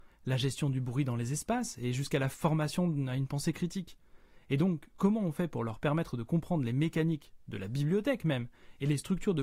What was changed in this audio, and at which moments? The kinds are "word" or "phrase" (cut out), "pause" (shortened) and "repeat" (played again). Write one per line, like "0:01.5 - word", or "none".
none